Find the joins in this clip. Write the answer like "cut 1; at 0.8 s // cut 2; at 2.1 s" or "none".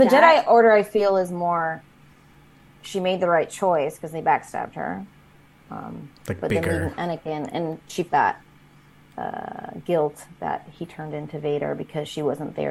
cut 1; at 8.1 s